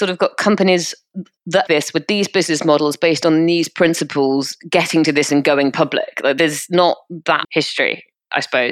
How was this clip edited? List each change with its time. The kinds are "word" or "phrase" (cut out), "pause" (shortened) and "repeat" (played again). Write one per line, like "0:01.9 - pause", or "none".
0:01.7 - word
0:05.3 - word
0:07.4 - word